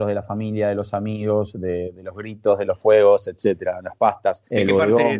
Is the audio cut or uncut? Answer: uncut